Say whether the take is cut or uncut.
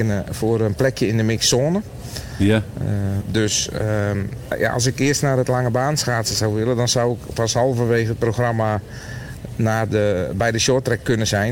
uncut